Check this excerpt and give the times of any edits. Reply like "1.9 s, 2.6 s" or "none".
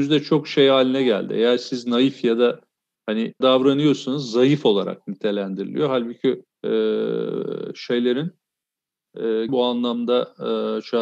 3.4 s, 6.5 s, 9.5 s